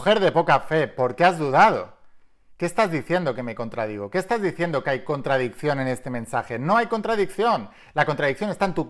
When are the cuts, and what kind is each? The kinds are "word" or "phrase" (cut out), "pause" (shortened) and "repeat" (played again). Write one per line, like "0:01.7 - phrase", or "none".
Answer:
none